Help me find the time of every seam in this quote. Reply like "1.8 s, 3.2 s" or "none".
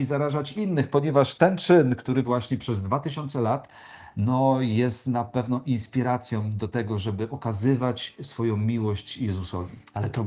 2.2 s